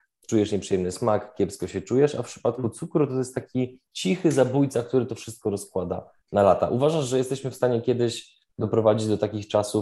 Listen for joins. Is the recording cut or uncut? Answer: cut